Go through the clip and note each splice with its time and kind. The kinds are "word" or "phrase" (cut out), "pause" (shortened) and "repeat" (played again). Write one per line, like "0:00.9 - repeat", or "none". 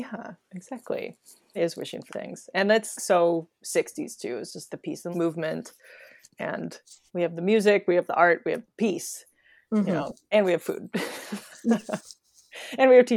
0:01.6 - word
0:02.1 - word
0:03.0 - word
0:04.7 - word
0:05.1 - word
0:07.1 - word